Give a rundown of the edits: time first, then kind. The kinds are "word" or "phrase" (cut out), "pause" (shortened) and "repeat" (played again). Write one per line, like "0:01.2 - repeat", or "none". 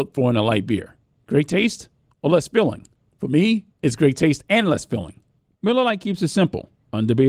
none

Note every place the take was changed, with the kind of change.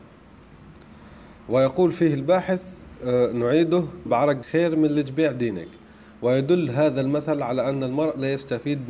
0:04.1 - word
0:04.4 - word

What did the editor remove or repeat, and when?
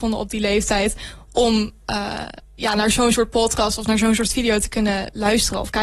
none

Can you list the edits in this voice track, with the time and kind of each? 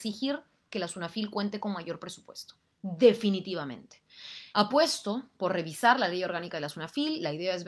0:04.5 - pause

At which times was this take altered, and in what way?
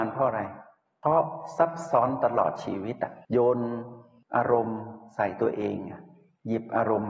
0:03.2 - pause

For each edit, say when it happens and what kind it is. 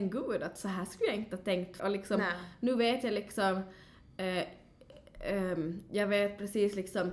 0:01.8 - word

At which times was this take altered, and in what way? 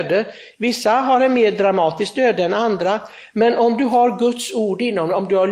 none

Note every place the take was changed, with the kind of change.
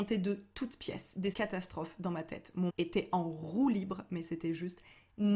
0:01.3 - word
0:02.7 - word

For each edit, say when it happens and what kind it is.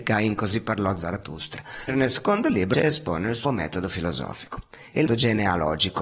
0:01.9 - word
0:02.7 - word
0:03.4 - word
0:05.1 - word

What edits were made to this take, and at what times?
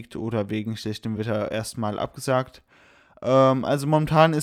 none

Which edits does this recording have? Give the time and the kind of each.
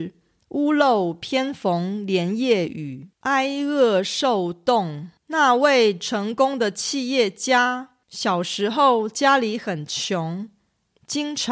0:03.1 - pause
0:05.2 - pause
0:08.0 - pause

